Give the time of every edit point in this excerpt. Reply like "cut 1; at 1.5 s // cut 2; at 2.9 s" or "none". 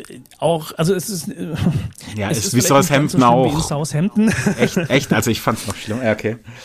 none